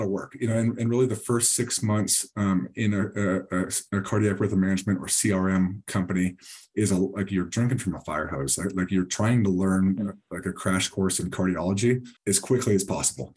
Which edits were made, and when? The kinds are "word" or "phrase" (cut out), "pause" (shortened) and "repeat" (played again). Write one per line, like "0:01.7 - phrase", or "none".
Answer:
0:12.2 - pause